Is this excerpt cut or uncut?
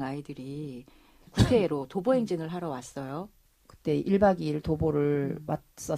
uncut